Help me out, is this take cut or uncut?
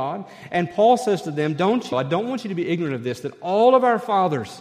cut